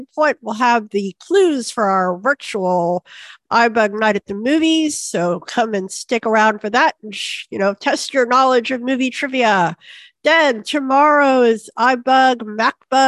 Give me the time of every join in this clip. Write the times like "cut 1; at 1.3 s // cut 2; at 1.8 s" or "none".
none